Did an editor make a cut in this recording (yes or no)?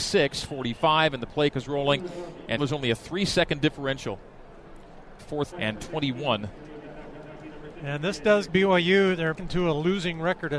yes